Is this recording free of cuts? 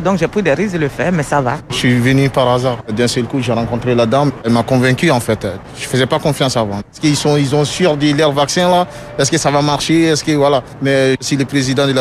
yes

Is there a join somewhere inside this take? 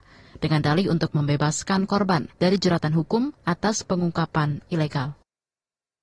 yes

